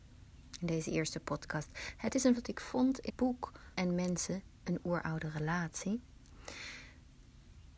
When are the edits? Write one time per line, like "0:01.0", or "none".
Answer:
0:02.4
0:03.1
0:03.7

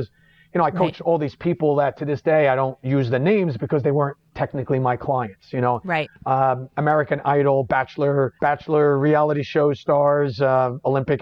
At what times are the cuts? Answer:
0:04.3
0:08.4

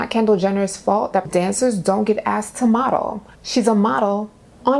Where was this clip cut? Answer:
0:01.2
0:03.3

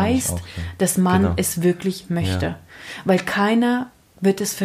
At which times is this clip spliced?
none

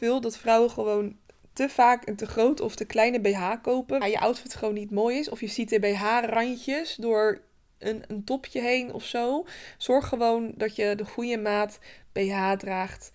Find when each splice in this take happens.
0:04.0

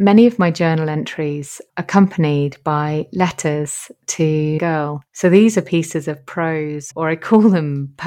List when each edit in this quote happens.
0:01.7
0:04.6
0:05.1
0:06.9

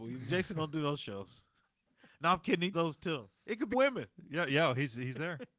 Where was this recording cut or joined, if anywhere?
0:01.9
0:02.7
0:03.4
0:03.7

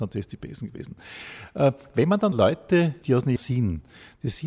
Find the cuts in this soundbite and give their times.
0:02.3
0:03.0
0:03.4

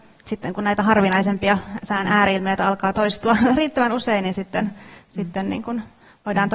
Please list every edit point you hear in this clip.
none

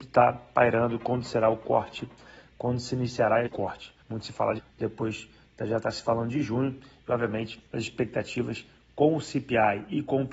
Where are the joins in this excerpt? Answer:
0:03.5
0:04.0
0:04.6
0:07.7

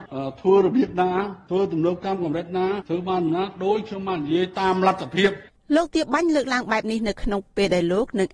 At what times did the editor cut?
0:05.5

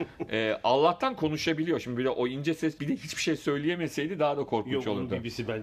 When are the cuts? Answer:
0:02.8

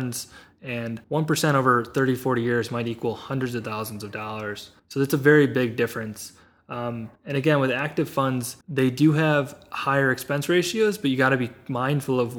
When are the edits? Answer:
0:01.0
0:04.8
0:07.2
0:08.6

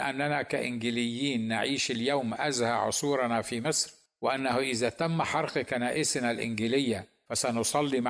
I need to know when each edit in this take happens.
none

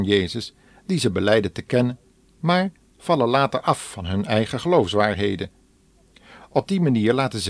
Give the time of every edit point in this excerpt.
none

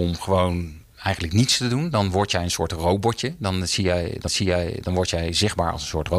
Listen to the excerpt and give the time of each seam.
0:04.3

